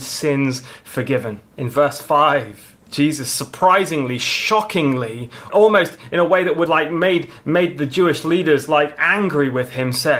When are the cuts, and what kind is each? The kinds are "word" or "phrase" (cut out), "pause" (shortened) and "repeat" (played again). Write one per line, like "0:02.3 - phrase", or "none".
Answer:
0:01.5 - pause
0:02.8 - pause
0:05.5 - word
0:06.7 - word